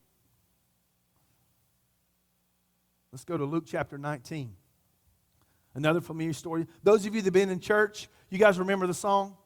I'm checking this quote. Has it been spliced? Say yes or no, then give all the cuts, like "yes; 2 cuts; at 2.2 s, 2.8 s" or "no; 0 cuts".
no; 0 cuts